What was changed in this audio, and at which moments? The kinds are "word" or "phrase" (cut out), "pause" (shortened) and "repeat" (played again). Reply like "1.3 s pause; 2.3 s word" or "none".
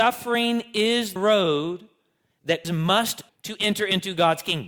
1.2 s word; 2.6 s word; 3.3 s word